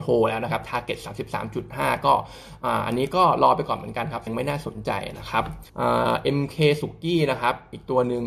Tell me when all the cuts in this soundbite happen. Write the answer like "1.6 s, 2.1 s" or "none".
4.3 s, 5.7 s